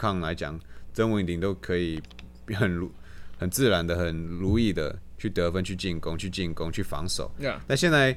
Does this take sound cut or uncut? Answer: cut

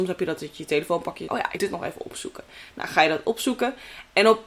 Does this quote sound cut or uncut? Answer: cut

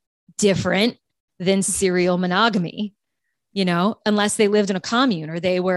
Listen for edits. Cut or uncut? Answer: uncut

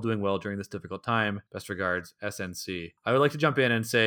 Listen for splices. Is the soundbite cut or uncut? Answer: cut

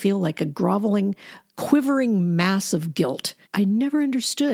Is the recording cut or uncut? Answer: cut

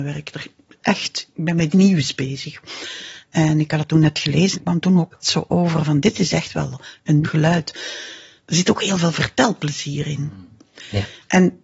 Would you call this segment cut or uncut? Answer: cut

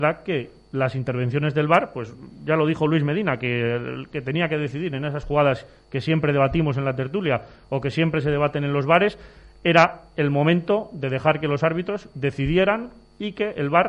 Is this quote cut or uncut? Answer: uncut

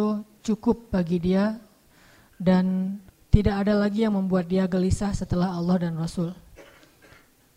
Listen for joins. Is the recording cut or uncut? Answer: cut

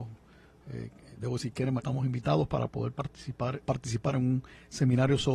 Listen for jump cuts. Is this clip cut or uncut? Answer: cut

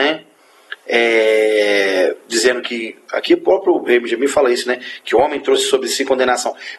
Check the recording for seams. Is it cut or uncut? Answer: uncut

